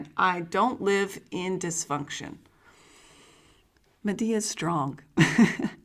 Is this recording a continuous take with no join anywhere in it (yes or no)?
yes